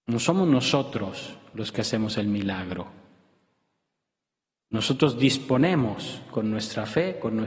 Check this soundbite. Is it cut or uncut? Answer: uncut